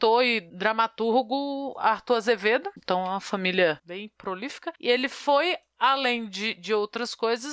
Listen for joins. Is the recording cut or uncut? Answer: uncut